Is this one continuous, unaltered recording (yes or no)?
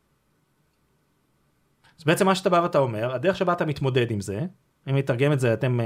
yes